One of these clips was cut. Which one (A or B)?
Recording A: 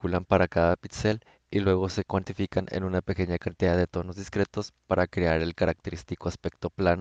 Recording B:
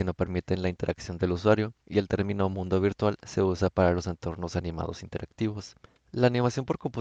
B